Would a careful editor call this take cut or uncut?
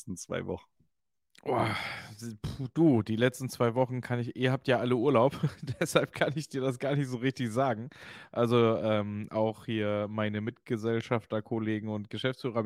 uncut